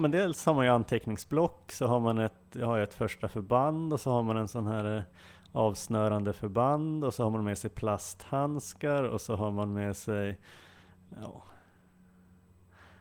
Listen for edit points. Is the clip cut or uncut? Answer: uncut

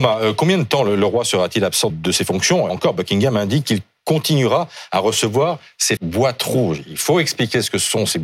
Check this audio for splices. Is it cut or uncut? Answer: cut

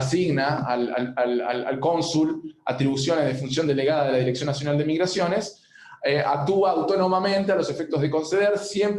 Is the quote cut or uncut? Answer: uncut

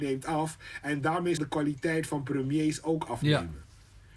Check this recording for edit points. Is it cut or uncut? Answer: cut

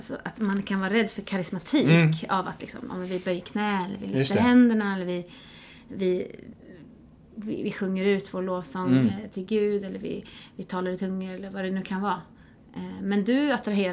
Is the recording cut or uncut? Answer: uncut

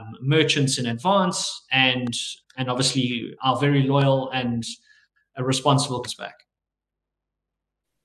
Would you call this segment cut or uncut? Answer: cut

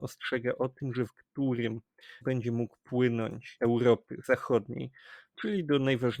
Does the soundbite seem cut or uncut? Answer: cut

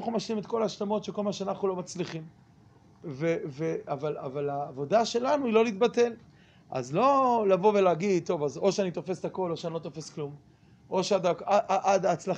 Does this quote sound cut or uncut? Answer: uncut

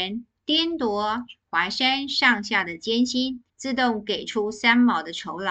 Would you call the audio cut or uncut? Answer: cut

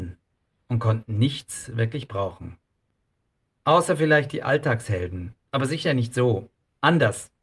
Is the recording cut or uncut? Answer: uncut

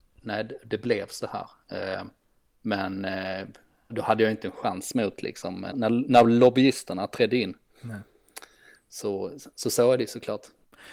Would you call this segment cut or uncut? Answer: cut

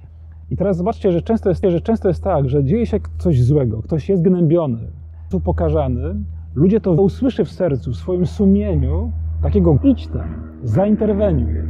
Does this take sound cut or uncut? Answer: cut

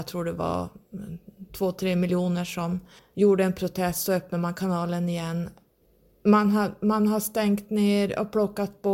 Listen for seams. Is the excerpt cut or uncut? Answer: cut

